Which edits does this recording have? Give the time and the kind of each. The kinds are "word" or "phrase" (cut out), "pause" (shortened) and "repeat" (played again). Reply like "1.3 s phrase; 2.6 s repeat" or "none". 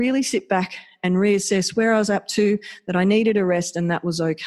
none